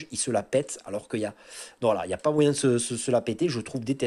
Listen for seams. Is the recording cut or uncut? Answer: uncut